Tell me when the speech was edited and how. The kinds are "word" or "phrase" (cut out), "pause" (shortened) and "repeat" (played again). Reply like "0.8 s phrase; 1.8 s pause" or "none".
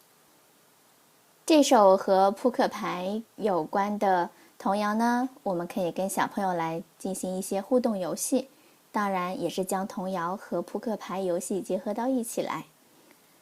3.3 s pause